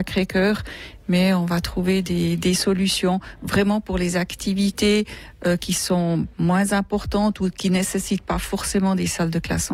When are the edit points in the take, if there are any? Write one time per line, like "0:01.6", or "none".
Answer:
none